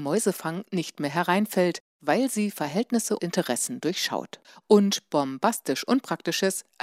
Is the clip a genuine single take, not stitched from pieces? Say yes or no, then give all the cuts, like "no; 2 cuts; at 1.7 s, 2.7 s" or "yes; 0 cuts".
no; 2 cuts; at 3.2 s, 4.4 s